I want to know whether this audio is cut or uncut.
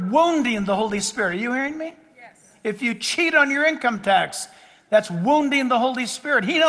uncut